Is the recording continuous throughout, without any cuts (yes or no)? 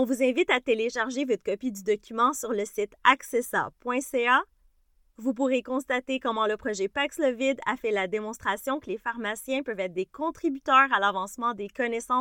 yes